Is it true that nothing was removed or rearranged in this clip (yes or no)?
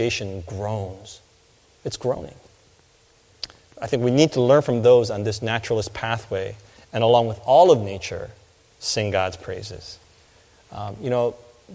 yes